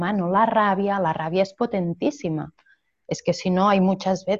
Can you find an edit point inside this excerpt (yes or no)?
no